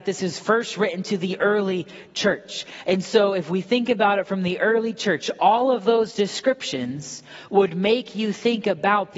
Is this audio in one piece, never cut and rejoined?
yes; 0 cuts

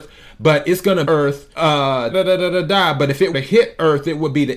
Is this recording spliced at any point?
yes; 4 cuts; at 1.0 s, 1.5 s, 2.1 s, 3.3 s

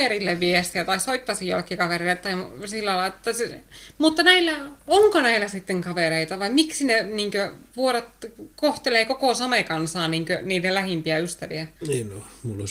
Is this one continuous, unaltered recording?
no; 3 cuts; at 4.8 s, 8.5 s, 11.8 s

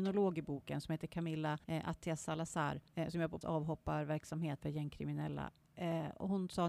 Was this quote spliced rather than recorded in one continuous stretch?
yes; 4 cuts; at 1.6 s, 2.9 s, 3.4 s, 4.6 s

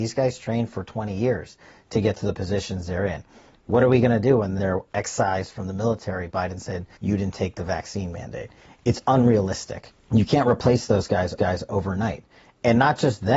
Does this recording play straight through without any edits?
no; 4 cuts; at 4.6 s, 6.3 s, 7.0 s, 11.4 s

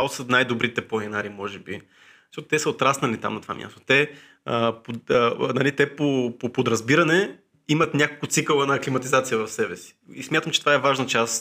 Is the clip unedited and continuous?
yes; 0 cuts

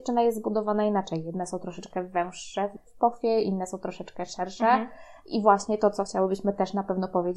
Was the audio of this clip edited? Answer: no; 0 cuts

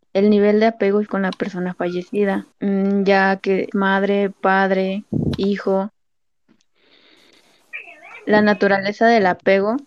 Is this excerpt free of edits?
no; 3 cuts; at 1.1 s, 2.5 s, 3.7 s

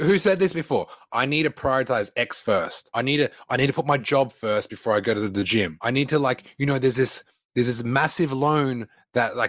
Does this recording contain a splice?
no; 0 cuts

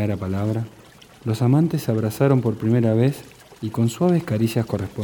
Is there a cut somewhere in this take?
no; 0 cuts

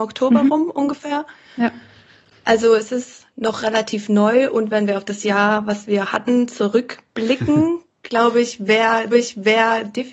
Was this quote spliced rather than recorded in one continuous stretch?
yes; 1 cut; at 9.1 s

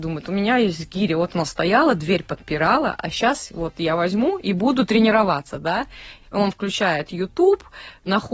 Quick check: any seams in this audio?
no; 0 cuts

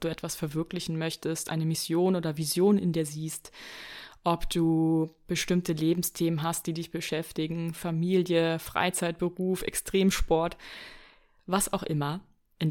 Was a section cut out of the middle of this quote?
no; 0 cuts

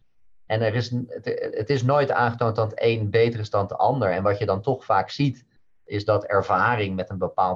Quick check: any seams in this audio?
no; 0 cuts

